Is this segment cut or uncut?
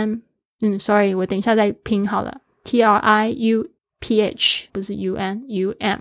cut